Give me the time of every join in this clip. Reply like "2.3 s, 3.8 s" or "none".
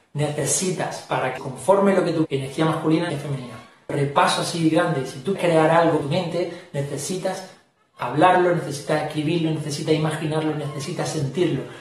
1.4 s, 2.2 s, 3.1 s, 3.9 s, 5.4 s, 6.0 s